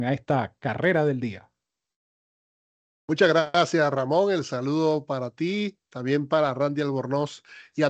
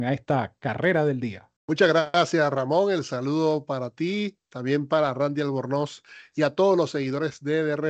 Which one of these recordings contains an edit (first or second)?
second